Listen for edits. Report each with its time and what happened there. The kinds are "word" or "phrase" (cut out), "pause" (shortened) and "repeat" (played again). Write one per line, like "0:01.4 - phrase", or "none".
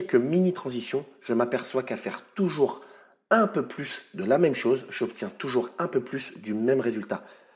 none